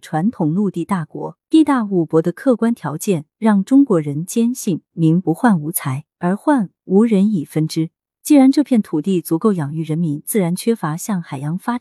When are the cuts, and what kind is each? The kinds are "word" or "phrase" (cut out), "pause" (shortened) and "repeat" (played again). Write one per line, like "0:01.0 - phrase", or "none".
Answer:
0:01.4 - pause
0:06.1 - pause